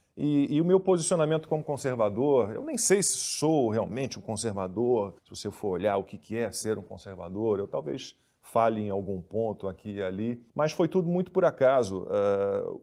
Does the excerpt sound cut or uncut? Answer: cut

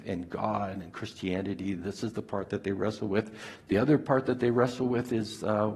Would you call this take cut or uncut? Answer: uncut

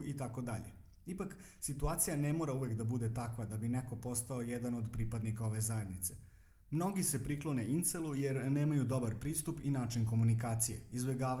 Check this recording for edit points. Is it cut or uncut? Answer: uncut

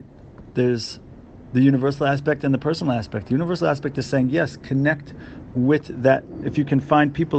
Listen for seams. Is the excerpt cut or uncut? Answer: uncut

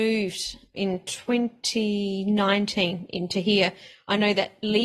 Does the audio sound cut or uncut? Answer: uncut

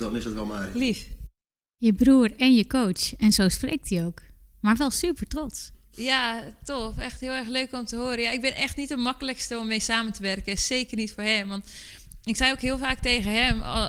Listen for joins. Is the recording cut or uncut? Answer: cut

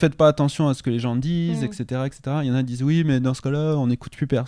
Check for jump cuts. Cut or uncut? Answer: uncut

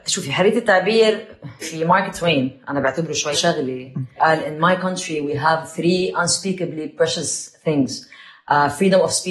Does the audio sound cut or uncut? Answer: cut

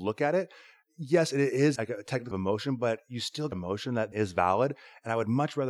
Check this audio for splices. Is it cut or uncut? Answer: cut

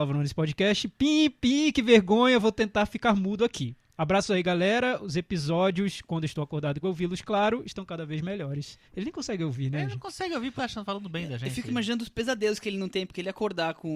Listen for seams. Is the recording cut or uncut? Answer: cut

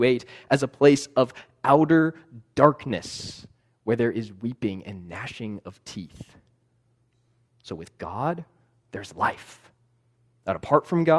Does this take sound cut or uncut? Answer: uncut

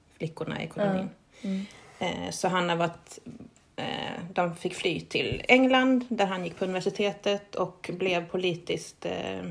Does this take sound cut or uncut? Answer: uncut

